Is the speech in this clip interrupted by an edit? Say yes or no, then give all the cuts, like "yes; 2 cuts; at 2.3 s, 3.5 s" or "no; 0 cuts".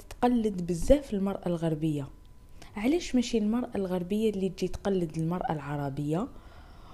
no; 0 cuts